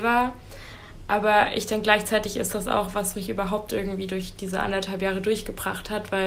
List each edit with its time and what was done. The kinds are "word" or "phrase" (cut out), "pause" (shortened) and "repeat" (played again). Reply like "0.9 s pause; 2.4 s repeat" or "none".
none

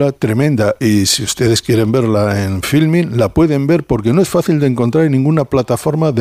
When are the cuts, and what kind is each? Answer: none

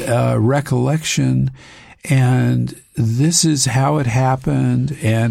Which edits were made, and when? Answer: none

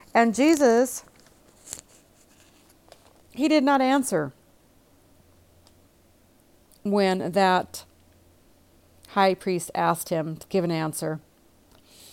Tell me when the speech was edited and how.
10.4 s word

